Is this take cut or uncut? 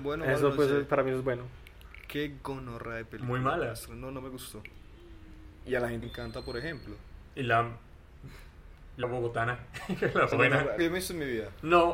cut